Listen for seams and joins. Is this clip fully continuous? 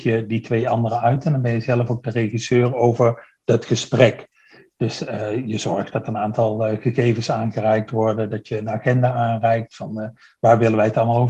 yes; 0 cuts

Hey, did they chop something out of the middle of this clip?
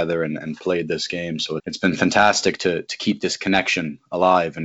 yes; 1 cut; at 1.6 s

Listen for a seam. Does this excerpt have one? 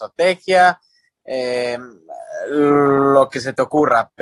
no; 0 cuts

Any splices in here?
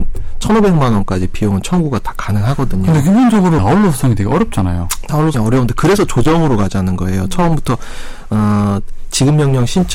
yes; 2 cuts; at 3.6 s, 5.3 s

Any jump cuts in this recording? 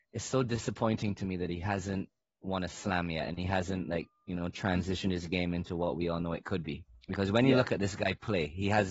no; 0 cuts

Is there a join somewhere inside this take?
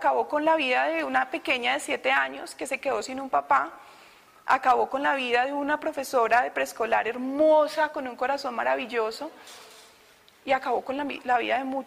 no; 0 cuts

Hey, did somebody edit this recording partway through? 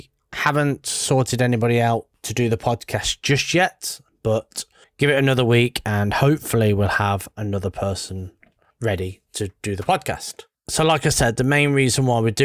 no; 0 cuts

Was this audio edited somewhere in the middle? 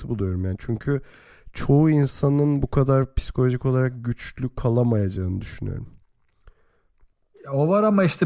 no; 0 cuts

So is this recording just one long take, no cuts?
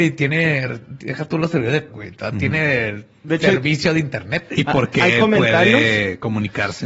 no; 1 cut; at 1.9 s

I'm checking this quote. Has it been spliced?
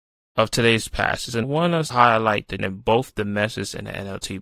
yes; 3 cuts; at 1.4 s, 1.9 s, 2.6 s

